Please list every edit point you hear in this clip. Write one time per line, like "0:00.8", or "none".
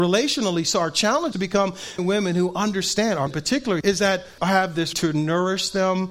0:01.3
0:02.0
0:03.3
0:03.8
0:04.4
0:04.9